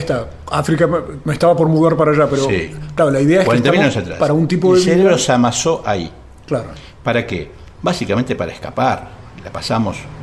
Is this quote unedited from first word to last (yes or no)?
yes